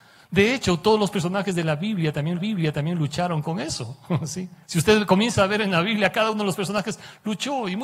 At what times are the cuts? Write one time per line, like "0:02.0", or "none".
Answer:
0:02.4
0:04.6